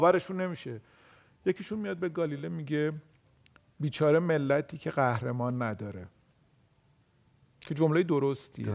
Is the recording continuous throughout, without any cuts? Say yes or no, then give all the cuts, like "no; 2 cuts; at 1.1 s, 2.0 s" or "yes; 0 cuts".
yes; 0 cuts